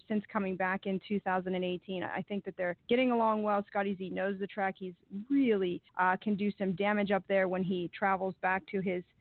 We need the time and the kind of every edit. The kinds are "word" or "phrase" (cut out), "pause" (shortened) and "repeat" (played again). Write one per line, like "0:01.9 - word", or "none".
0:02.8 - pause
0:05.9 - pause

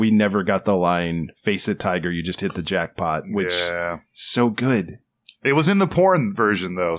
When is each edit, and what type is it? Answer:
none

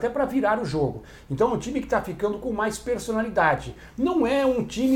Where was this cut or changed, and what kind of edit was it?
none

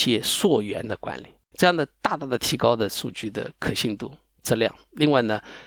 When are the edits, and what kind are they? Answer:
none

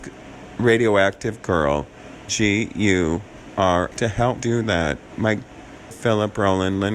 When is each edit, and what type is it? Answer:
0:02.3 - word
0:03.9 - word
0:04.4 - word
0:05.9 - word

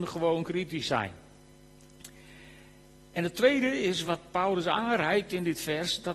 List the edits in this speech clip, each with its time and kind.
none

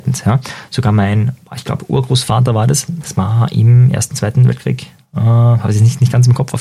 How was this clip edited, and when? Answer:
none

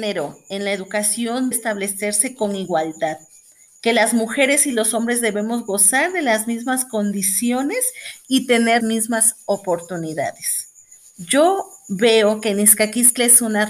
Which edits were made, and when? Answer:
0:01.5 - word
0:08.8 - word

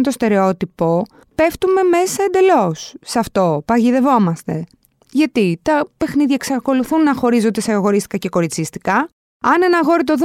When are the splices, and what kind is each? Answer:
none

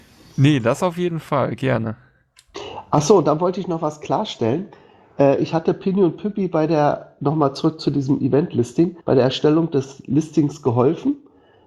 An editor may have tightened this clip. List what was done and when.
0:09.0 - pause

